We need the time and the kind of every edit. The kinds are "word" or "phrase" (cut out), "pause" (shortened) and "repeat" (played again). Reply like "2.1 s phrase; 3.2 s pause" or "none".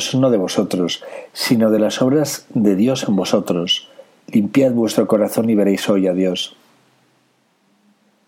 none

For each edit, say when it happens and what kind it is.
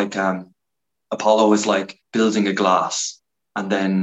2.1 s pause

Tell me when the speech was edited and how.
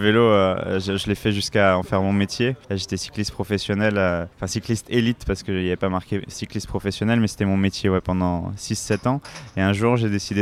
2.6 s pause; 4.3 s pause

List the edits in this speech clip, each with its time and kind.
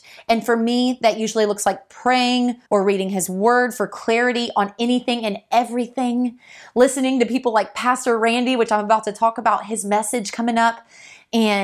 2.6 s pause

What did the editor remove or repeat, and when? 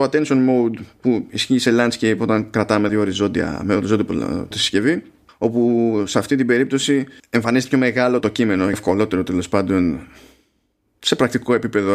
2.9 s word; 4.5 s word; 5.3 s pause; 7.2 s pause; 8.2 s word; 8.7 s phrase

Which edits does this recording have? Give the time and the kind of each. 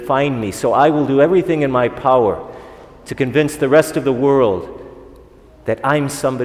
none

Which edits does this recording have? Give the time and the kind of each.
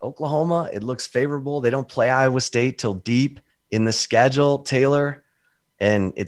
3.5 s pause

